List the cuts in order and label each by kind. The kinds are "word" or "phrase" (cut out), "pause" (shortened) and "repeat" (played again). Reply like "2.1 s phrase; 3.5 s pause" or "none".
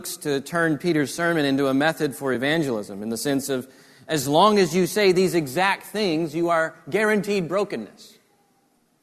none